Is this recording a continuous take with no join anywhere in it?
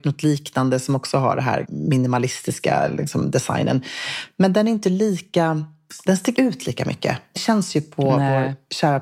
no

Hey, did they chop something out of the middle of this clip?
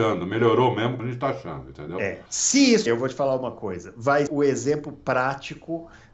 yes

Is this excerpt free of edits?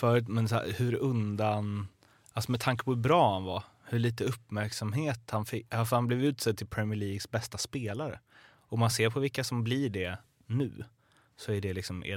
yes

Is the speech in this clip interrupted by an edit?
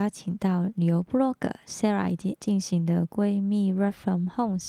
yes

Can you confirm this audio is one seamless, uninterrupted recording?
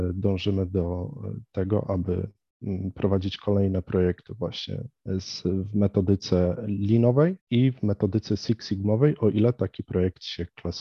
no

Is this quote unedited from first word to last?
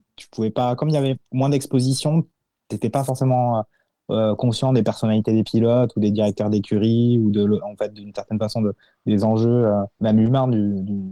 no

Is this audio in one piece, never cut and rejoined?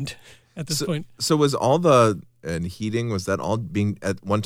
no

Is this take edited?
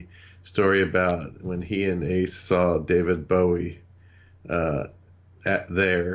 no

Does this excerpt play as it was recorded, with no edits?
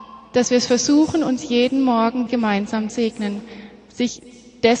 no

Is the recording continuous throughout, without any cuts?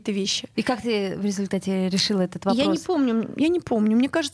yes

